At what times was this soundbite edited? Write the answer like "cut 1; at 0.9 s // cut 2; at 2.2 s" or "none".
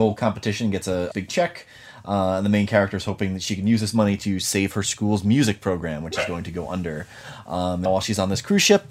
cut 1; at 1.1 s // cut 2; at 7.9 s